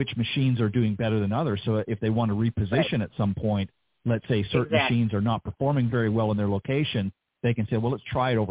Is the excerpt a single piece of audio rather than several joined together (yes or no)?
yes